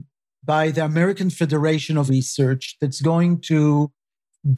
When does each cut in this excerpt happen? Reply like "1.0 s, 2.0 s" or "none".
2.1 s